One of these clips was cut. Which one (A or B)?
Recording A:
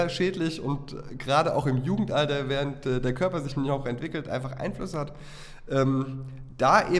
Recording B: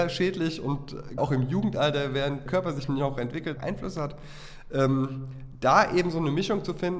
B